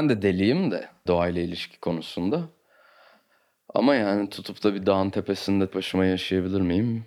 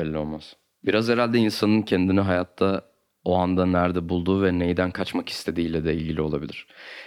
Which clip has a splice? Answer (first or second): first